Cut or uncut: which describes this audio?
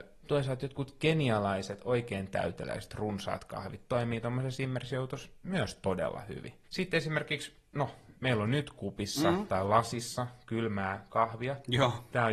cut